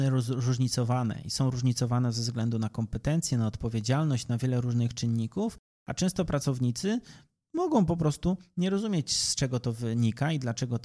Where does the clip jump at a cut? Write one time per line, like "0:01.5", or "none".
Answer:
none